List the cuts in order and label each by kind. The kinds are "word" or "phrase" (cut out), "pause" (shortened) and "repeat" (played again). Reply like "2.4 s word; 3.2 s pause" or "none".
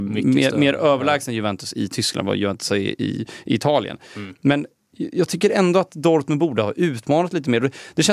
none